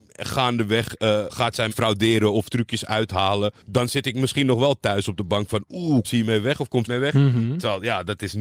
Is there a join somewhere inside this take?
yes; 5 cuts; at 1.3 s, 1.7 s, 3.6 s, 6.0 s, 6.9 s

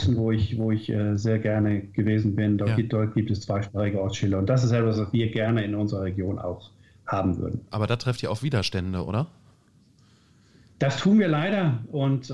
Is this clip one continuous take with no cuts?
yes; 0 cuts

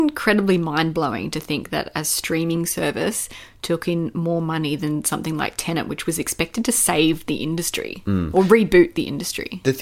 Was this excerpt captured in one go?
yes; 0 cuts

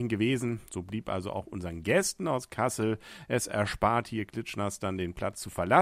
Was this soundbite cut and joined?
no; 0 cuts

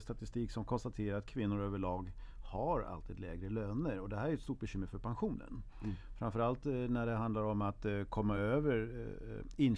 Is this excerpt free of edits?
yes; 0 cuts

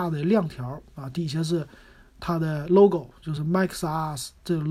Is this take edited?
no; 0 cuts

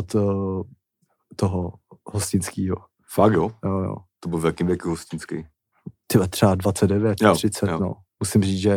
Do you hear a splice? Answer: no; 0 cuts

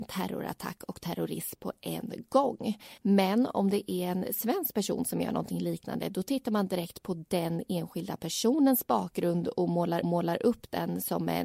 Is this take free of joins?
no; 2 cuts; at 3.0 s, 10.0 s

